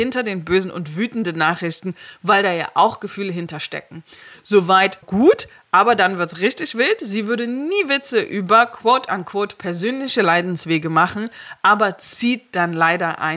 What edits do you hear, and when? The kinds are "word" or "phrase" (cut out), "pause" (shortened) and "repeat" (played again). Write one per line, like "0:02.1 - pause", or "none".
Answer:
0:05.0 - word